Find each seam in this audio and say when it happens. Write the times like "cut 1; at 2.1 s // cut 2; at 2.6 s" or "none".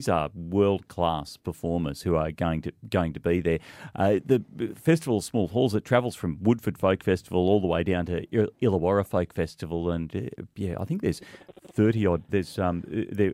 cut 1; at 12.3 s